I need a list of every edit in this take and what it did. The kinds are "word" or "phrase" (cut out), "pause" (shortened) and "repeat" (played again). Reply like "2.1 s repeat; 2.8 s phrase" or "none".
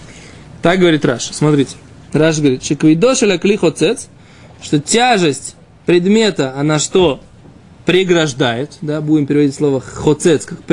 none